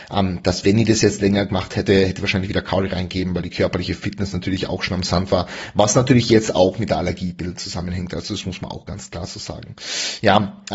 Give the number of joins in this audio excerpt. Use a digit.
0